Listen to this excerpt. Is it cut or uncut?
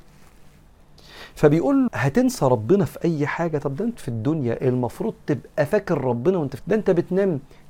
cut